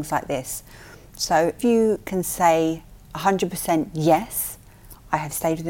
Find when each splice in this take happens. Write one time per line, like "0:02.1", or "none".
0:01.6
0:03.0

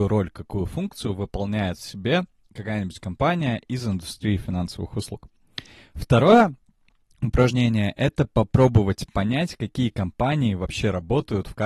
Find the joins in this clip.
none

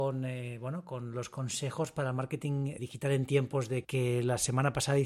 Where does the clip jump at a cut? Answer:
0:02.8
0:03.8

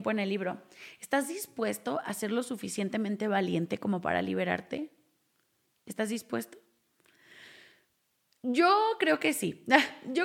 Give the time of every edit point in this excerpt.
none

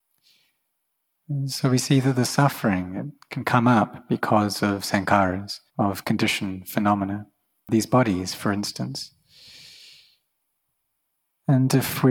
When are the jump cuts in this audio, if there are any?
0:05.7

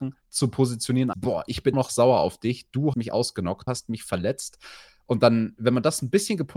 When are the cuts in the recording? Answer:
0:01.1
0:01.7
0:02.9
0:03.7

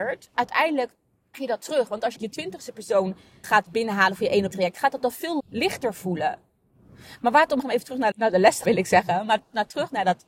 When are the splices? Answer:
0:01.3
0:02.2
0:03.4
0:04.5
0:05.4
0:07.6
0:08.1
0:08.6

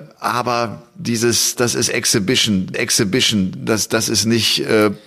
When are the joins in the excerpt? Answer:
0:01.6
0:02.7

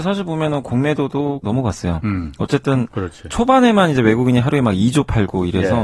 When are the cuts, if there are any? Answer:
0:01.4

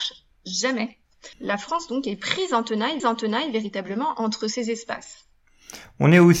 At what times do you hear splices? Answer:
0:01.3
0:03.0

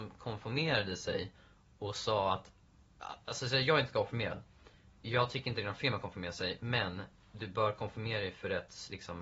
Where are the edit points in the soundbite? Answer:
none

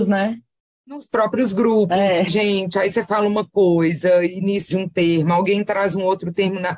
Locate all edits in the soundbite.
0:02.3
0:04.7

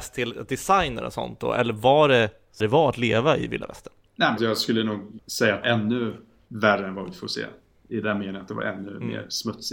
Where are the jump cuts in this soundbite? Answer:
0:02.6
0:04.4
0:05.2
0:05.6

